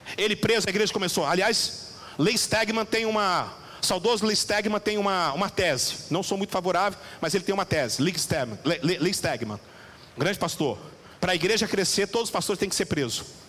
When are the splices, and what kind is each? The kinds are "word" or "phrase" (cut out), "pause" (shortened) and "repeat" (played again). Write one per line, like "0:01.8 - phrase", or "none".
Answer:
0:10.1 - pause
0:11.2 - pause